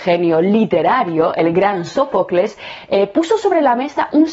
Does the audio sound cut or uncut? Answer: uncut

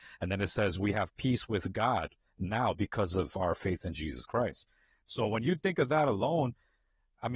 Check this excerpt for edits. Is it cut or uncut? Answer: uncut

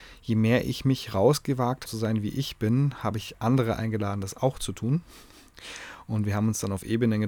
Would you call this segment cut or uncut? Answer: cut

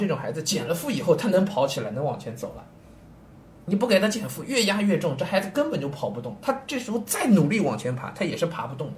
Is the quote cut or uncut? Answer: uncut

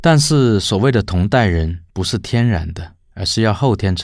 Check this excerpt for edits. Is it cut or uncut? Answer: cut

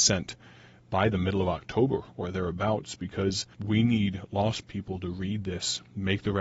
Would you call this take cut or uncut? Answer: cut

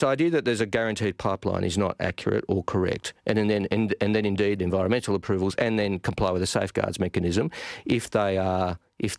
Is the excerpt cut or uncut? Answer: cut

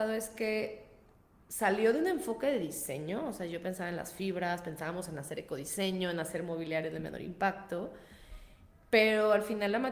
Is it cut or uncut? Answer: uncut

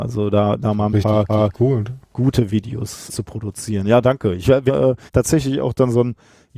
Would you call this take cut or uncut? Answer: cut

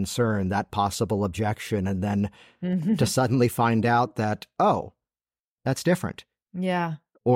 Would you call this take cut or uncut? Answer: uncut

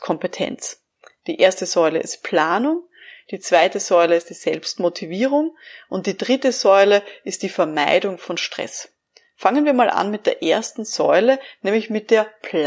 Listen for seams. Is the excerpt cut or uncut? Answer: uncut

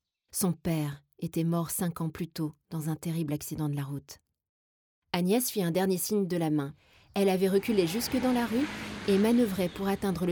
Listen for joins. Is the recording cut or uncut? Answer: uncut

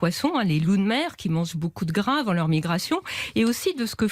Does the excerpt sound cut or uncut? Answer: uncut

